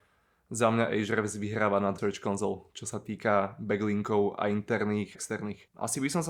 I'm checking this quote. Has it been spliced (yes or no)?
yes